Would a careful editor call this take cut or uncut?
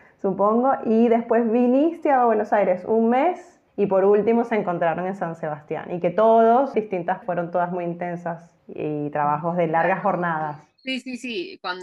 cut